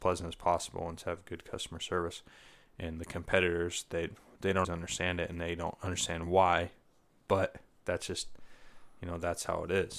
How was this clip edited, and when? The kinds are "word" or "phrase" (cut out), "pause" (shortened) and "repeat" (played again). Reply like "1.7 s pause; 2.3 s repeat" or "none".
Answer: 4.6 s word